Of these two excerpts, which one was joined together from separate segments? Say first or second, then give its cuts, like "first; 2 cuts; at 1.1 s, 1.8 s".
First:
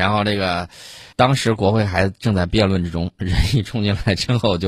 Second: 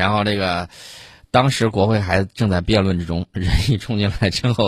first; 1 cut; at 1.1 s